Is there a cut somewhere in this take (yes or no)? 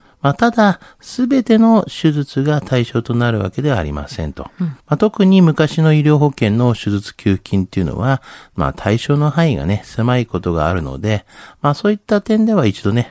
yes